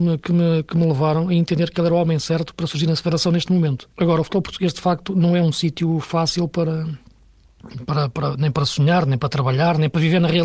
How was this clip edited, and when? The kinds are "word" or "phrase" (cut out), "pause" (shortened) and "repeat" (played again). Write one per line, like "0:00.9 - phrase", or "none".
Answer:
0:03.9 - pause